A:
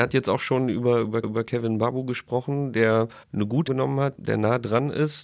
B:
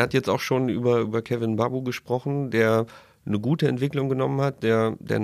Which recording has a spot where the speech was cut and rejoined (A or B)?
A